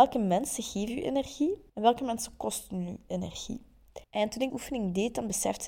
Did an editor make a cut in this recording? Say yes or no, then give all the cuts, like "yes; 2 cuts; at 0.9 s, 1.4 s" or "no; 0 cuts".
yes; 3 cuts; at 1.7 s, 4.0 s, 4.5 s